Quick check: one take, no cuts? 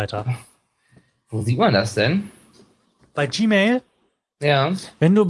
yes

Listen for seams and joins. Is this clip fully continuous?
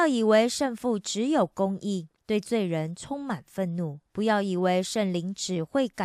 no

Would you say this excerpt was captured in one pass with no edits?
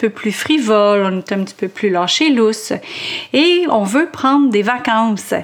no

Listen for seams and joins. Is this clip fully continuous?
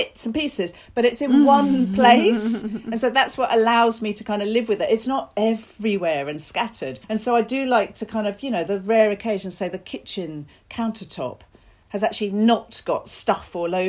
no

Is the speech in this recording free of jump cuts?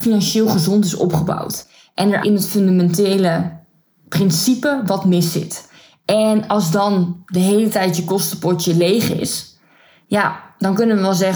no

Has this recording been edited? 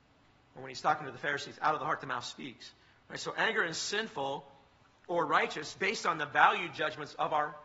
no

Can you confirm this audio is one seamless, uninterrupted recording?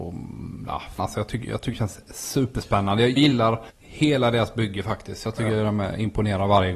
no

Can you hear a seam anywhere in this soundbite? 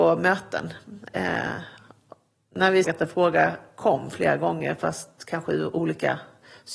yes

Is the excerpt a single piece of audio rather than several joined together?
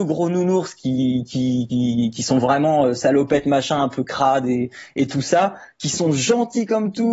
yes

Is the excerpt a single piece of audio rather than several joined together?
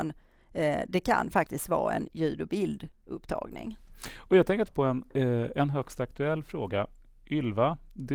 no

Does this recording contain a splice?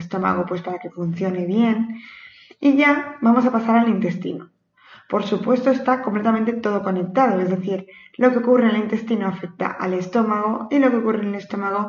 no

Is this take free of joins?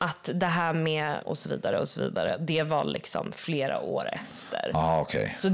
no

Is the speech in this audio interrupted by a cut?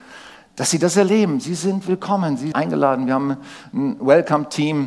yes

